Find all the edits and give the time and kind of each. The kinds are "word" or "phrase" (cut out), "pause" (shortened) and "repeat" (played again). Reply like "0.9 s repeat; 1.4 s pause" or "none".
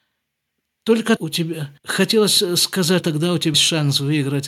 1.2 s word; 1.8 s pause; 3.0 s phrase; 3.5 s word